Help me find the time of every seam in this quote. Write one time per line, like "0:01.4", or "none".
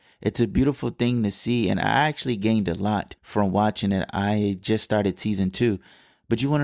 0:03.2